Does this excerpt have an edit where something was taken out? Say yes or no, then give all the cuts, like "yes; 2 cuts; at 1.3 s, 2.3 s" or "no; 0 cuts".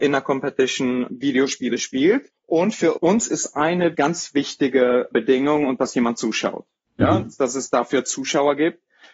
no; 0 cuts